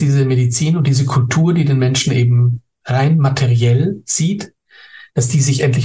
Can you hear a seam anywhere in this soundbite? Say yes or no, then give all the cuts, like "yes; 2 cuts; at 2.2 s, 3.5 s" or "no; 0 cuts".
no; 0 cuts